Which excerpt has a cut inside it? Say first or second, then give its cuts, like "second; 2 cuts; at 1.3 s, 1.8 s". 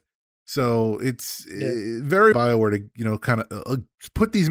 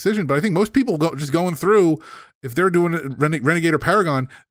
first; 1 cut; at 2.3 s